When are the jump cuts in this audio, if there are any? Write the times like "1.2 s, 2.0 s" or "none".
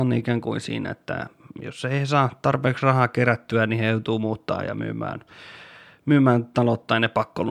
none